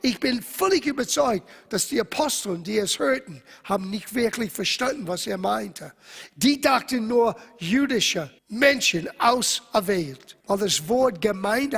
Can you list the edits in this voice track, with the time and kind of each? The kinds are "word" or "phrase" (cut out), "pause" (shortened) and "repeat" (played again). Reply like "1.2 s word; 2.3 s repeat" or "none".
8.4 s pause; 10.4 s pause